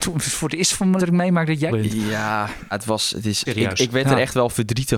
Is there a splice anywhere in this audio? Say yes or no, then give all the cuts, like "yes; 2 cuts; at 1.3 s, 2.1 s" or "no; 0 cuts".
yes; 4 cuts; at 1.0 s, 1.7 s, 2.7 s, 3.5 s